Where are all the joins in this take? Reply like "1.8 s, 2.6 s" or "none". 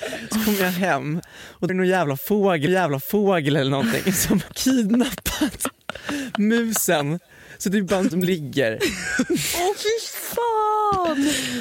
1.7 s, 2.7 s, 4.5 s, 8.1 s